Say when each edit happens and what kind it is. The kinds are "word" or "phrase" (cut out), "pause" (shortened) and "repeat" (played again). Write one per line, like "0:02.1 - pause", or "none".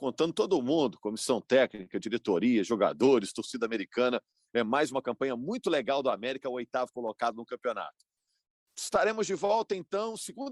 none